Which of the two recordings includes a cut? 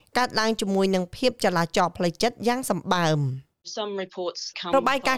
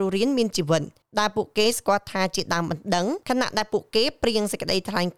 second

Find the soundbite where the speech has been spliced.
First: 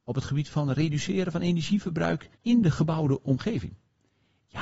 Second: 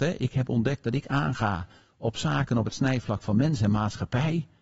first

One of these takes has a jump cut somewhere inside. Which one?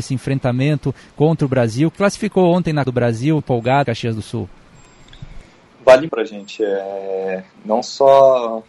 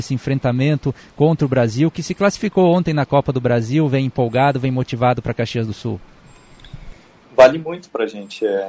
first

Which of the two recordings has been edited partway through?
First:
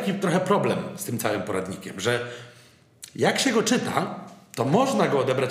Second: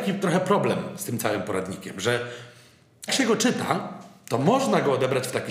second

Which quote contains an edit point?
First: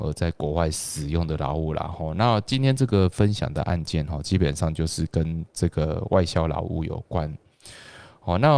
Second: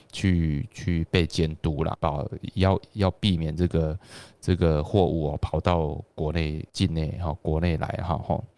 second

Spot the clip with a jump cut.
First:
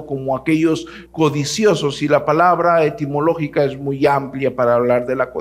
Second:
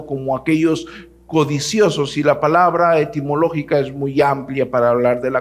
first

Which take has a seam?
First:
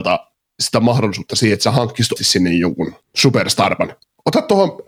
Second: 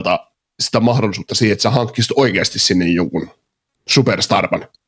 first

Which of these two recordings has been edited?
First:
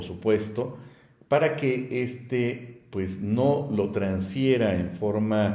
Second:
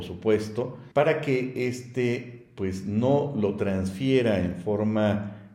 second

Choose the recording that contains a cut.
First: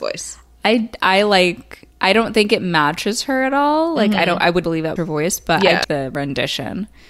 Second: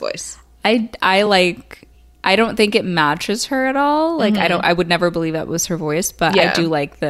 first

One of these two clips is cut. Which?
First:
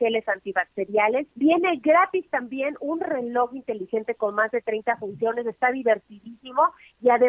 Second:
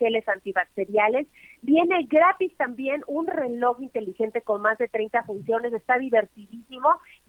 first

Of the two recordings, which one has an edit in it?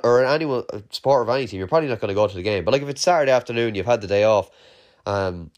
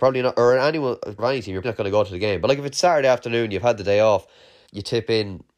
second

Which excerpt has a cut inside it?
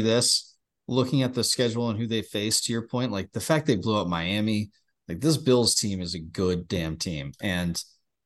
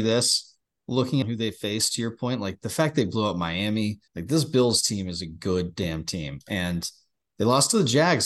second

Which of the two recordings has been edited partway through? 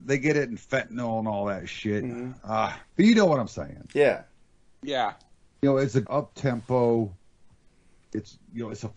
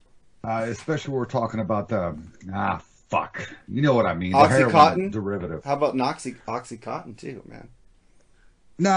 first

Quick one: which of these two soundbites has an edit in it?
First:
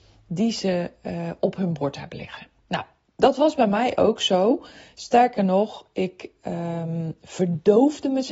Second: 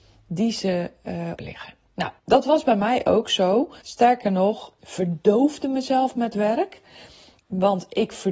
second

